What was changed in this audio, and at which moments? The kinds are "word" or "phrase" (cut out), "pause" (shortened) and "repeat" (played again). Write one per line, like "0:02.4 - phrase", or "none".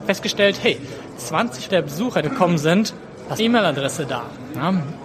0:01.7 - word
0:02.2 - phrase
0:03.4 - word